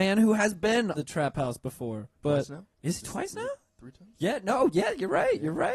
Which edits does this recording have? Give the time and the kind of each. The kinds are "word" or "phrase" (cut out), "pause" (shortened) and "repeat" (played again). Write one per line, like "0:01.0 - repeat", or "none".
0:00.9 - word
0:02.2 - pause
0:02.7 - pause